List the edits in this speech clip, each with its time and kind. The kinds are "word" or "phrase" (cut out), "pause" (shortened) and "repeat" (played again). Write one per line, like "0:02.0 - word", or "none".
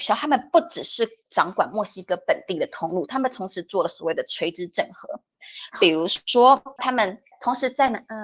0:06.8 - phrase